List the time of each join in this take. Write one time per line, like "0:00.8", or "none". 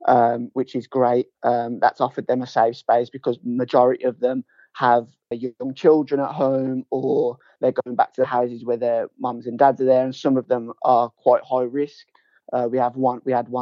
0:05.3